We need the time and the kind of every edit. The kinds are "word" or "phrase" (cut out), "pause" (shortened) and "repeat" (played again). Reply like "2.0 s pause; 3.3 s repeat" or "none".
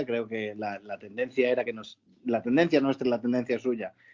none